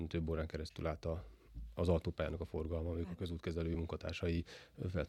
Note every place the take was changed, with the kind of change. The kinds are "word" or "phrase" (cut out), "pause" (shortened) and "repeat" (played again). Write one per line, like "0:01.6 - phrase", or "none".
none